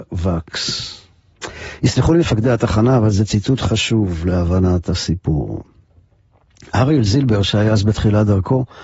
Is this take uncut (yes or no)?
yes